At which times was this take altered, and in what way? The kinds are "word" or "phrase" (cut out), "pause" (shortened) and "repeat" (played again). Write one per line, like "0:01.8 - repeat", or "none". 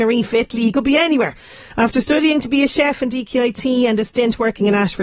none